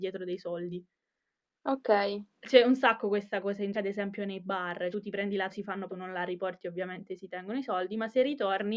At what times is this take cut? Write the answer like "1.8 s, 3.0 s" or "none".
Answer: 2.3 s, 3.7 s, 4.9 s, 5.5 s, 5.9 s